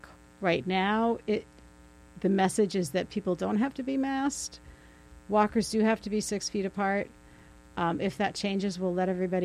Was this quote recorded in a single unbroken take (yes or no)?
yes